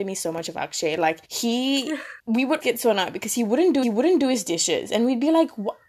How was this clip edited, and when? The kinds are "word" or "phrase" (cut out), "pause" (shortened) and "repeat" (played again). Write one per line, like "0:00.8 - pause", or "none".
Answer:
0:01.2 - pause
0:02.2 - pause
0:02.6 - word
0:03.8 - repeat